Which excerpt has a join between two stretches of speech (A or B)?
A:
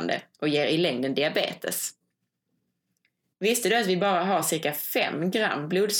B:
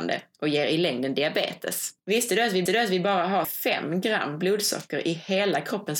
B